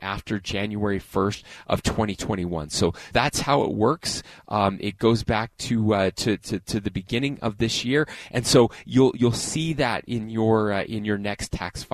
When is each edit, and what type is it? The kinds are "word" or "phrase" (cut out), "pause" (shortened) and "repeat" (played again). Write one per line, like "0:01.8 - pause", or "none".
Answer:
0:03.1 - word